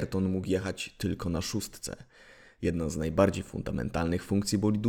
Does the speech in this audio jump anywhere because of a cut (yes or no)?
no